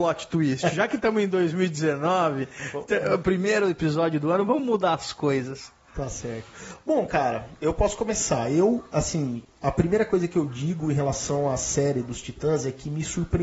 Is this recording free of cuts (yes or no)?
yes